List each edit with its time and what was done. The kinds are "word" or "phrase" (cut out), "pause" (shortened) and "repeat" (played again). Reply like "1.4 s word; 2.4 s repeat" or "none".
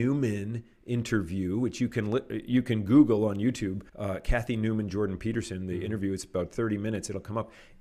3.9 s pause